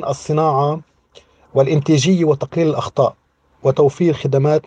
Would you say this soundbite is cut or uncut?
uncut